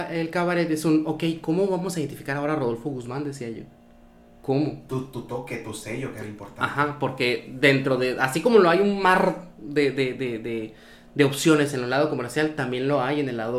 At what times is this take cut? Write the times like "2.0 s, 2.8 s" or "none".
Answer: none